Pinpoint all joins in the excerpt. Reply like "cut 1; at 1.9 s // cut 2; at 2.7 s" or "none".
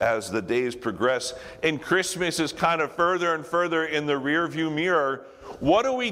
none